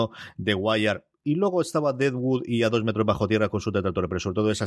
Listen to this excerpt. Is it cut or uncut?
uncut